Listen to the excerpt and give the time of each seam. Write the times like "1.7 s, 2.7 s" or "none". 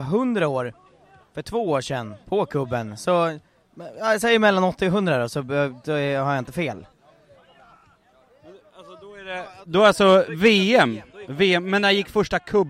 none